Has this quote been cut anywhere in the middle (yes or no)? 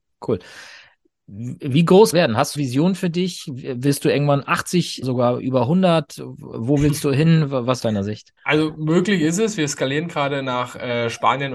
yes